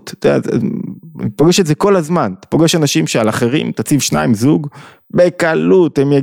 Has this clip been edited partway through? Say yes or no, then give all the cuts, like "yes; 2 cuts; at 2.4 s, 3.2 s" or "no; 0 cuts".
no; 0 cuts